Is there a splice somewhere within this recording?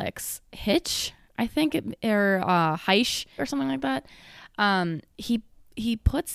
yes; 1 cut; at 3.4 s

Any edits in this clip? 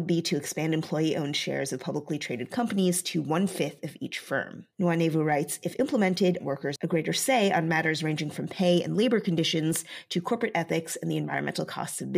yes; 2 cuts; at 4.7 s, 6.4 s

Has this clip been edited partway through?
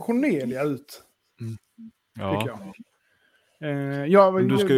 no; 0 cuts

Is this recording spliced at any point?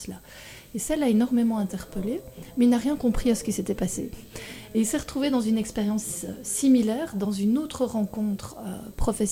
no; 0 cuts

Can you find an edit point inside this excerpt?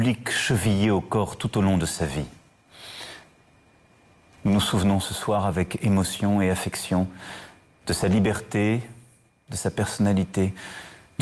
no; 0 cuts

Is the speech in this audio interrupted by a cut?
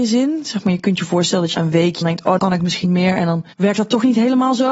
yes; 5 cuts; at 1.5 s, 2.0 s, 2.4 s, 2.8 s, 3.5 s

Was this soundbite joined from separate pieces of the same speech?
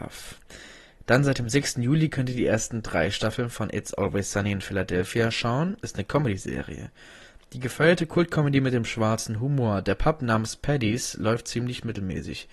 no; 0 cuts

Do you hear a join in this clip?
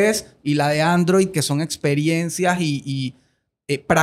no; 0 cuts

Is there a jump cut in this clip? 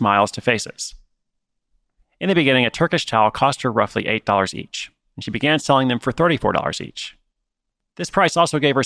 no; 0 cuts

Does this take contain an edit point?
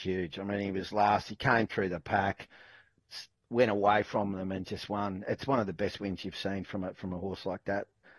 no; 0 cuts

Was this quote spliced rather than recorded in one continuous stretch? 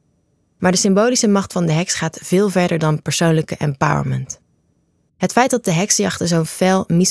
no; 0 cuts

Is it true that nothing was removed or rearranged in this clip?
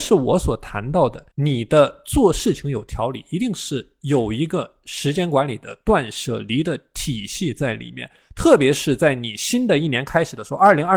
no; 1 cut; at 1.3 s

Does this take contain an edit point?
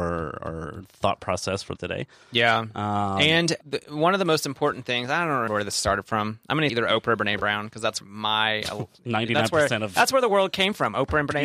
yes; 5 cuts; at 1.8 s, 3.6 s, 5.5 s, 6.7 s, 8.0 s

